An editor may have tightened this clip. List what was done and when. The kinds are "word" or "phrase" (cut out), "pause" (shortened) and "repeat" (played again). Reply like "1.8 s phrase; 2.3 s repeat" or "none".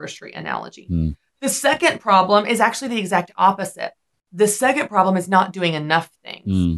none